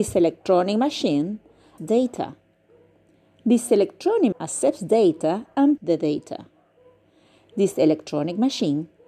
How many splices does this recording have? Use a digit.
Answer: 3